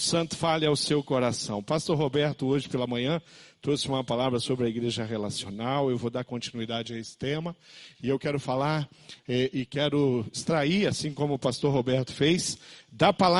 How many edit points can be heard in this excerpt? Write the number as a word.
zero